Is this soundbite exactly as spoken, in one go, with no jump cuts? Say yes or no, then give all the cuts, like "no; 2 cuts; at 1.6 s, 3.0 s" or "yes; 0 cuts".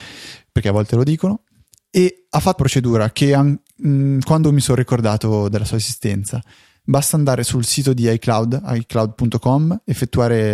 no; 2 cuts; at 2.6 s, 4.4 s